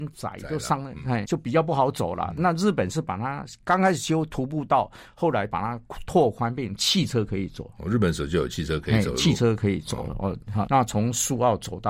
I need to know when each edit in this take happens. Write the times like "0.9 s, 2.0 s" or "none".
1.2 s, 10.7 s

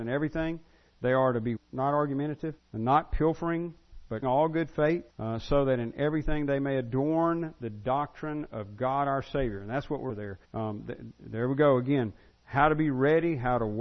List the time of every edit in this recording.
1.6 s, 2.6 s, 4.2 s, 5.1 s, 10.1 s, 10.4 s

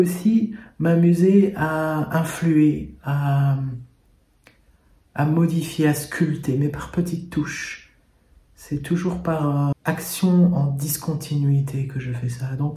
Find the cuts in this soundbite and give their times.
9.7 s

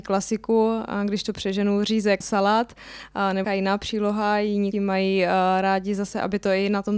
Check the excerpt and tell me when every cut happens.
2.2 s, 3.4 s, 4.7 s

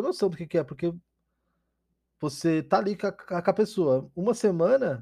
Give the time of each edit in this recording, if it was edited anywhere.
none

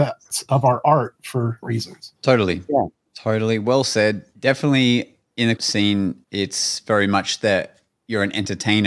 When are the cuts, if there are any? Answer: 1.6 s, 2.2 s, 4.3 s, 5.6 s, 6.2 s

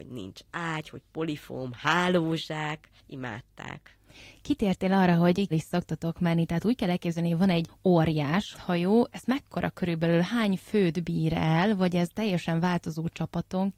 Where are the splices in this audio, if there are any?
5.5 s, 8.5 s

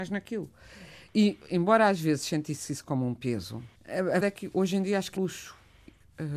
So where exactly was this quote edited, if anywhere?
3.8 s, 4.2 s, 5.2 s

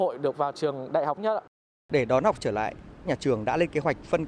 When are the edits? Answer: 1.2 s, 2.4 s, 3.1 s

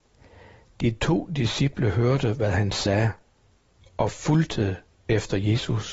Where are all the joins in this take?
none

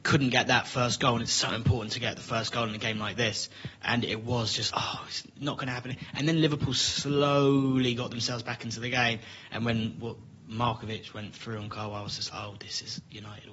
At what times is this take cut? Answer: 3.7 s, 4.7 s, 12.3 s

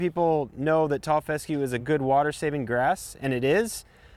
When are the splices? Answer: none

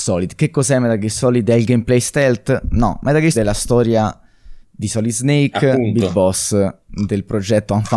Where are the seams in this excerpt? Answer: 3.3 s, 4.6 s

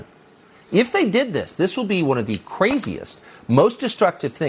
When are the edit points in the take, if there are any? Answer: none

